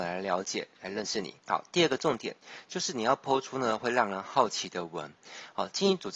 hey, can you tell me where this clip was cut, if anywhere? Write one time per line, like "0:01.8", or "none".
0:01.4

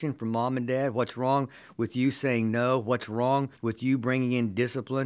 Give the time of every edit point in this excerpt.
0:03.6

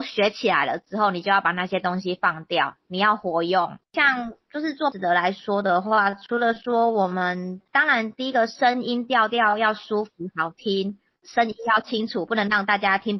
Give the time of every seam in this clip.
0:03.8
0:04.9

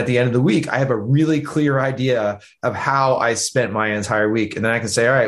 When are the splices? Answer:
none

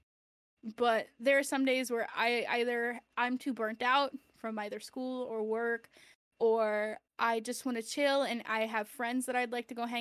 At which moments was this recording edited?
0:07.1

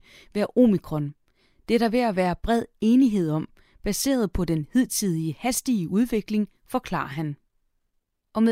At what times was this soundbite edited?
none

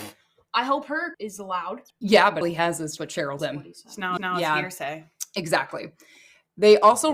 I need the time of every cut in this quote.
0:01.1
0:01.9
0:02.4
0:03.0
0:03.4
0:04.2

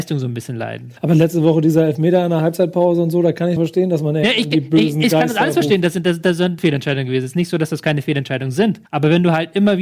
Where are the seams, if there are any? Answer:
0:01.0
0:03.6
0:06.6
0:08.8

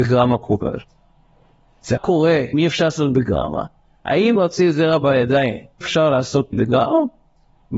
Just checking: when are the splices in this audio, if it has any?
0:02.0
0:02.5
0:04.4
0:05.8
0:06.5

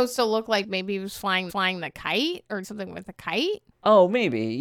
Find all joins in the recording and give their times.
0:01.5
0:02.6
0:03.7

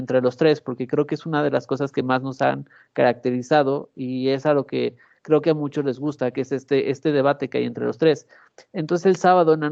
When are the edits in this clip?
none

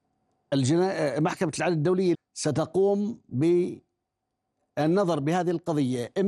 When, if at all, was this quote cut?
0:02.1

